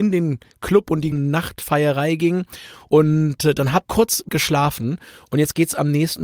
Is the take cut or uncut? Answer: cut